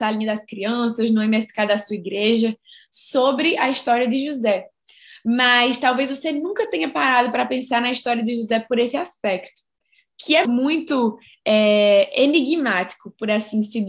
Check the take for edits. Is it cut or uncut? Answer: cut